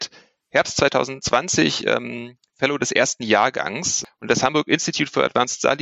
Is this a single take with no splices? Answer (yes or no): yes